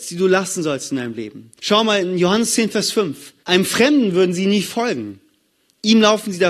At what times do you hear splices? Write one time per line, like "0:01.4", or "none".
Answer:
0:01.6
0:03.4